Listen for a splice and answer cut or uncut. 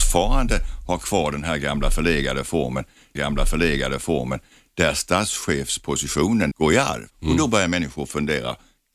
cut